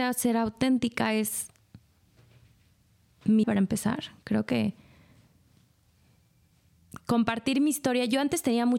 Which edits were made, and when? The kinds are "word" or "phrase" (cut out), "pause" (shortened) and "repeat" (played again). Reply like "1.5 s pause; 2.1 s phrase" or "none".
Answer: 3.4 s word